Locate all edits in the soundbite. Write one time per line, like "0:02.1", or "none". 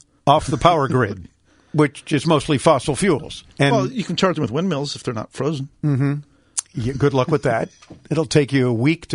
0:03.5